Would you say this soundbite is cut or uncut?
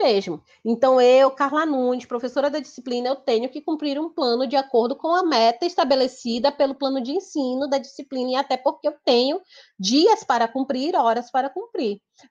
uncut